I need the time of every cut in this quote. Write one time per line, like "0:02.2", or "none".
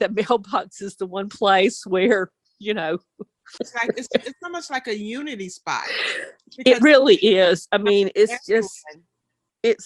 none